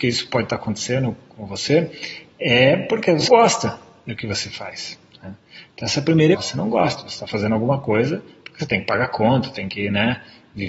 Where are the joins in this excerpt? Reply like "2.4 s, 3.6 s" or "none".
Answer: 3.3 s, 6.3 s